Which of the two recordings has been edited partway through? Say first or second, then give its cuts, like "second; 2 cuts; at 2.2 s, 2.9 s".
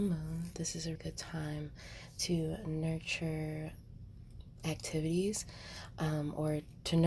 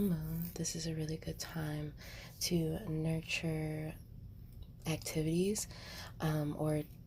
first; 1 cut; at 1.0 s